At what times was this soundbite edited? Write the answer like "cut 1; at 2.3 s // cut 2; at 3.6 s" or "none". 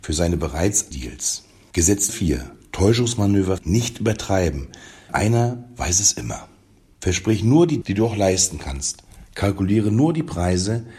cut 1; at 0.9 s // cut 2; at 2.1 s // cut 3; at 3.6 s // cut 4; at 5.1 s // cut 5; at 7.8 s

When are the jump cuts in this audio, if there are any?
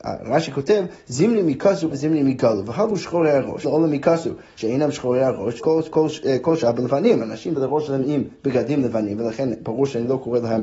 cut 1; at 1.9 s // cut 2; at 3.6 s // cut 3; at 5.6 s // cut 4; at 5.9 s // cut 5; at 7.6 s

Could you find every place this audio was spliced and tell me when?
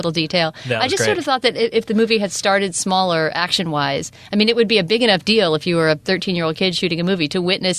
none

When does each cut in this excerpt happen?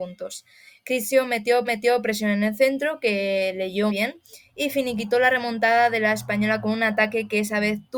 cut 1; at 1.6 s // cut 2; at 3.9 s

